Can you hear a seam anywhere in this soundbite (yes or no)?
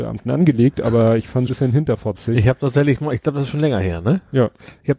yes